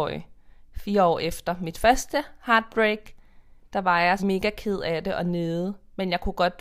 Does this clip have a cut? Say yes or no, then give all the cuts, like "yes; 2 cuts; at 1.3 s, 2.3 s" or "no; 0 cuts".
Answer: yes; 2 cuts; at 3.6 s, 4.2 s